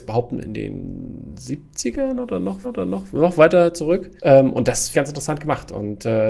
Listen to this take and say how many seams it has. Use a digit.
3